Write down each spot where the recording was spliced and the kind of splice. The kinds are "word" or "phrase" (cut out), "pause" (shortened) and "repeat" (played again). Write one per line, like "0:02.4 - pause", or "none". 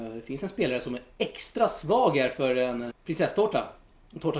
0:02.9 - word